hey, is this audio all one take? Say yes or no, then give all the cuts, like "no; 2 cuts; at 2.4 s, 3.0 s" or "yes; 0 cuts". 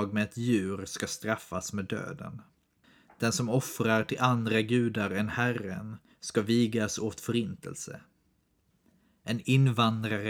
yes; 0 cuts